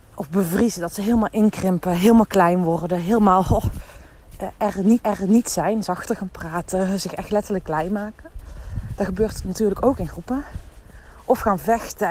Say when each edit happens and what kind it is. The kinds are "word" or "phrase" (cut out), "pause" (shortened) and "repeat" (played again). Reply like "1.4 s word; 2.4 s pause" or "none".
5.0 s repeat